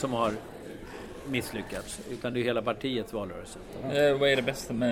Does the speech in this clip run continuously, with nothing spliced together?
yes; 0 cuts

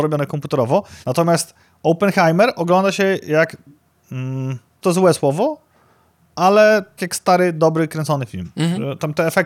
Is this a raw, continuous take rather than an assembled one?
no; 3 cuts; at 1.0 s, 4.8 s, 7.0 s

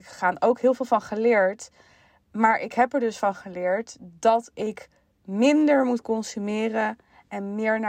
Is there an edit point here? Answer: no; 0 cuts

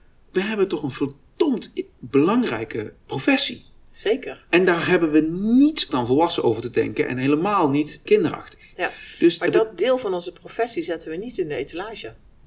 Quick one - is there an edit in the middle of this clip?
yes; 3 cuts; at 3.1 s, 5.9 s, 8.1 s

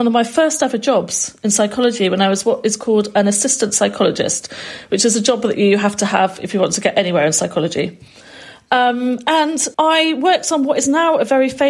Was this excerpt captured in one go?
no; 1 cut; at 9.7 s

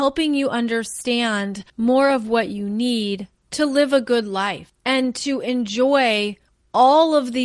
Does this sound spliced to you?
yes; 1 cut; at 1.7 s

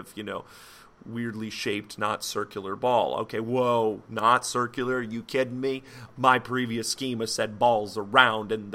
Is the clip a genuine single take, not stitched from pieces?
yes; 0 cuts

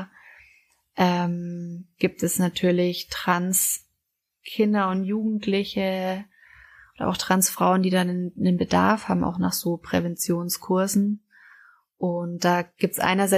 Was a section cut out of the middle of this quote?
no; 0 cuts

